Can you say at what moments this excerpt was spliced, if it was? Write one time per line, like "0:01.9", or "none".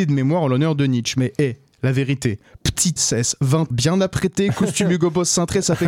0:03.0
0:03.7